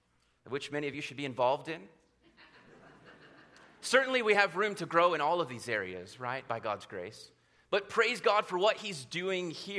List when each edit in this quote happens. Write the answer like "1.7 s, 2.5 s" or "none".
none